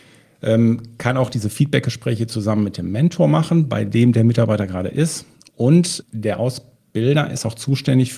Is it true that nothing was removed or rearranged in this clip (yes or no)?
no